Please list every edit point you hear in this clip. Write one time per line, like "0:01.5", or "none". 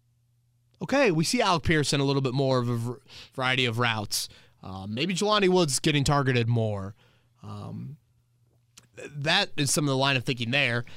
none